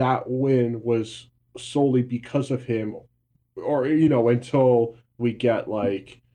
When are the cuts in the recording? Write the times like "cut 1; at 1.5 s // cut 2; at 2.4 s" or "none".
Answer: none